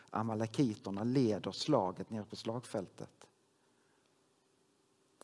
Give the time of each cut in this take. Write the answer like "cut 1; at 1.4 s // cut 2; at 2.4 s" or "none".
none